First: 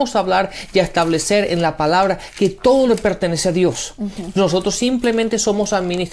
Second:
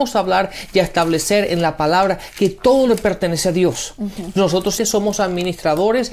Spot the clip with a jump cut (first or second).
second